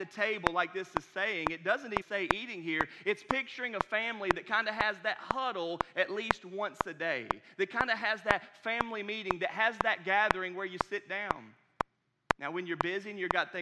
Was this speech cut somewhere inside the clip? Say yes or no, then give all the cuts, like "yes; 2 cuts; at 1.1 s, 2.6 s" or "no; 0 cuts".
yes; 1 cut; at 2.0 s